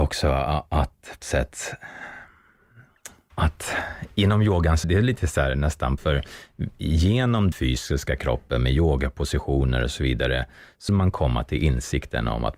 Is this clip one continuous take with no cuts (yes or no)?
no